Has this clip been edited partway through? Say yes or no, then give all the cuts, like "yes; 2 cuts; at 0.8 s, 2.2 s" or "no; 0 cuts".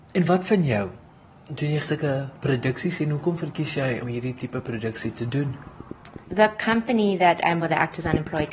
yes; 4 cuts; at 1.8 s, 4.0 s, 6.2 s, 7.6 s